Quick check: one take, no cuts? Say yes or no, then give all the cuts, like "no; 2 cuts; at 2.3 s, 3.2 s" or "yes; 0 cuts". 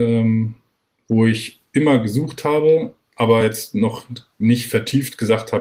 yes; 0 cuts